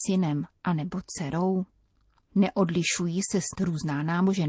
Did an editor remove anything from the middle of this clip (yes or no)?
yes